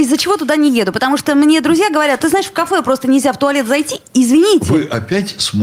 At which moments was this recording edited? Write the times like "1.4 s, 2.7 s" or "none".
2.2 s